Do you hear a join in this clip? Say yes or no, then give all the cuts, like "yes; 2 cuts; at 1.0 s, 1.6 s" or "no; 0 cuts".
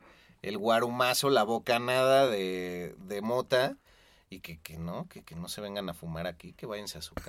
no; 0 cuts